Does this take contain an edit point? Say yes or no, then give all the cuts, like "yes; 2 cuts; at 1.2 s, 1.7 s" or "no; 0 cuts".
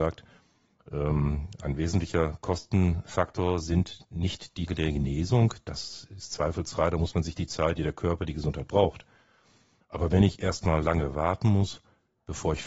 yes; 2 cuts; at 4.7 s, 7.8 s